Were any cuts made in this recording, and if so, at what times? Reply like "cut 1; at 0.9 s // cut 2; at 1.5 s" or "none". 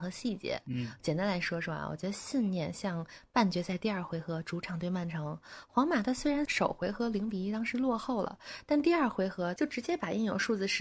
none